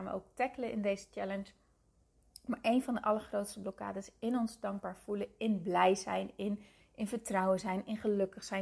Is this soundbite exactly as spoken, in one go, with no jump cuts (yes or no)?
yes